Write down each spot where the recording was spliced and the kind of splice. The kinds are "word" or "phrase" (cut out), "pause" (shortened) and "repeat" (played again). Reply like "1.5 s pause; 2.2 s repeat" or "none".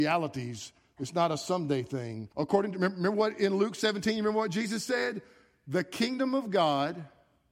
2.3 s pause